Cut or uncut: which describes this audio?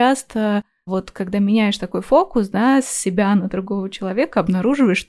uncut